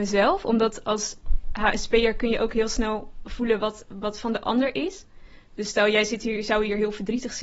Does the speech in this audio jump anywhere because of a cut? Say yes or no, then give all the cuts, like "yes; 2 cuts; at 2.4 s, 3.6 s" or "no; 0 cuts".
no; 0 cuts